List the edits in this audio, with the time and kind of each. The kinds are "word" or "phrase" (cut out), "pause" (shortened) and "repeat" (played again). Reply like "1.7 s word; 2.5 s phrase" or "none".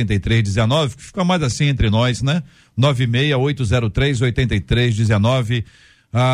none